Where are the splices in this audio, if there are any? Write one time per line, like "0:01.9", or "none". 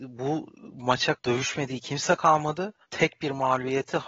0:01.1
0:02.8